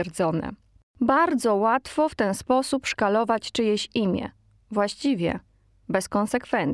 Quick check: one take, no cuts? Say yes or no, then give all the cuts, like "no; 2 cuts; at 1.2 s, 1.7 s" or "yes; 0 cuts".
yes; 0 cuts